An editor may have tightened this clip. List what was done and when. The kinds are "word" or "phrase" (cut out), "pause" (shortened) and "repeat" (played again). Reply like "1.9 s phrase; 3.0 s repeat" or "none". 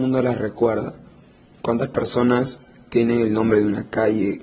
none